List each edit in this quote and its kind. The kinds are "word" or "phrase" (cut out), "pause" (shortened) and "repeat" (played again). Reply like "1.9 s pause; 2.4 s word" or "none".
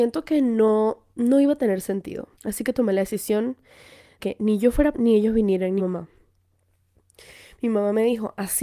1.1 s pause; 2.3 s pause; 4.2 s word; 4.9 s word; 5.8 s word

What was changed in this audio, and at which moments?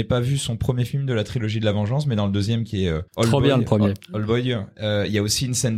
3.1 s pause

